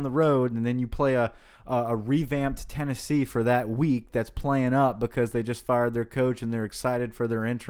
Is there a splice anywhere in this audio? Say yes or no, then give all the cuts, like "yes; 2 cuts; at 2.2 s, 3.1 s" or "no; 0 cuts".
no; 0 cuts